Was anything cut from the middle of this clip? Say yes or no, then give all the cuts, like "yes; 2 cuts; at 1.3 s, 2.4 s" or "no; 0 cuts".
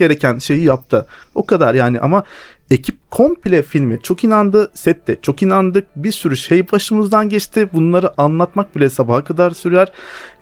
no; 0 cuts